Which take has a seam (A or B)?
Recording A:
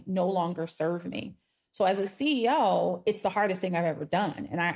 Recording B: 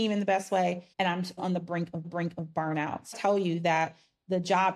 B